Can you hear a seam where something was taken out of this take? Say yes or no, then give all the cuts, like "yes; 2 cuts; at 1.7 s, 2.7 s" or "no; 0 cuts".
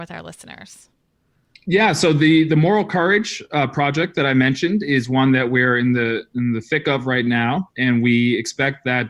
no; 0 cuts